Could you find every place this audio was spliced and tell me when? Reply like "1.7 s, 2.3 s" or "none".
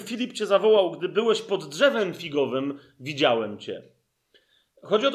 none